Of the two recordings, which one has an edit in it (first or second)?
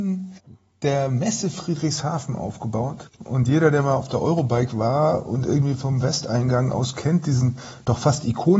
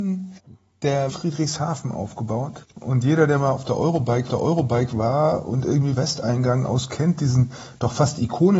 second